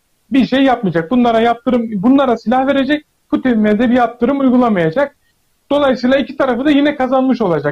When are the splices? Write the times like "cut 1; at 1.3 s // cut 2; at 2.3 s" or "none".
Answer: none